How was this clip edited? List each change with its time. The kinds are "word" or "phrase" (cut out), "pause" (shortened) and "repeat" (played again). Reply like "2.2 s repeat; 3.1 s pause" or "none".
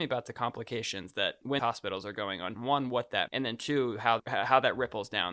1.6 s word; 2.5 s word; 3.3 s word; 4.2 s word